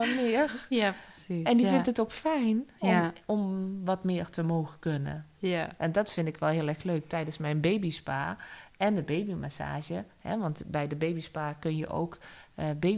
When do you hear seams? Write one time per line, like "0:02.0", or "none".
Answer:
none